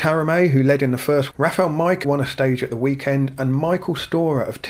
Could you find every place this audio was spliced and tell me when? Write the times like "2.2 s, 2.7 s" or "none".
1.3 s, 2.0 s